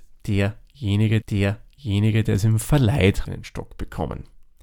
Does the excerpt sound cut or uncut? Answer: cut